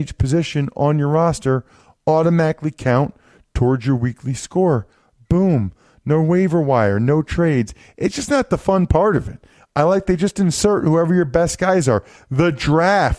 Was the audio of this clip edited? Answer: no; 0 cuts

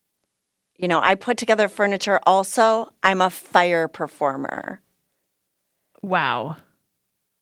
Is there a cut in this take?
no; 0 cuts

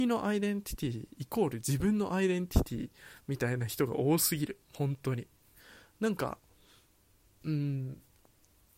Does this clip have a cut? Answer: yes; 1 cut; at 4.6 s

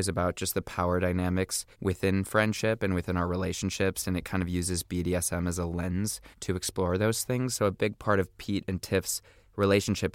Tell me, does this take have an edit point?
yes; 2 cuts; at 1.7 s, 6.3 s

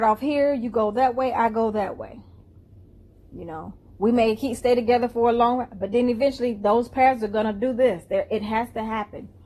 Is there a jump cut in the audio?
no; 0 cuts

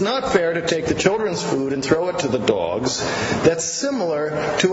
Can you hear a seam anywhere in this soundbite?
no; 0 cuts

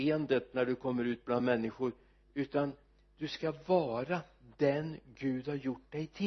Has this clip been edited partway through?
no; 0 cuts

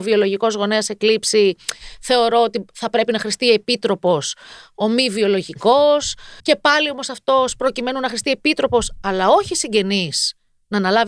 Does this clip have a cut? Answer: yes; 1 cut; at 6.4 s

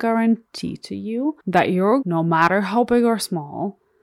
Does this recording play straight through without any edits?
no; 2 cuts; at 1.4 s, 2.0 s

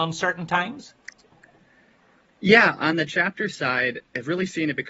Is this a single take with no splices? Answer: yes; 0 cuts

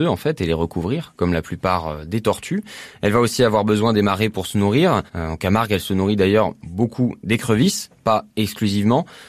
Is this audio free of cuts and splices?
no; 1 cut; at 5.1 s

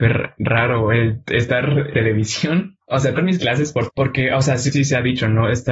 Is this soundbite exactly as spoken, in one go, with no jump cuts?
no; 4 cuts; at 1.9 s, 3.2 s, 3.9 s, 4.7 s

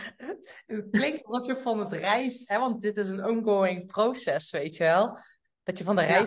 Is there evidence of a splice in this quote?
no; 0 cuts

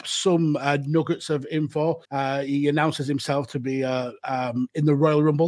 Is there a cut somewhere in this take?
yes; 1 cut; at 2.0 s

